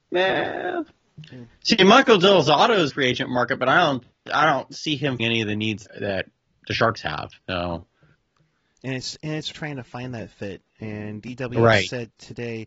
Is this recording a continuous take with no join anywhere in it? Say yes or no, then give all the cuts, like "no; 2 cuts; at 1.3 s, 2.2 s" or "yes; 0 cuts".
no; 6 cuts; at 1.5 s, 2.9 s, 5.2 s, 5.9 s, 7.4 s, 9.5 s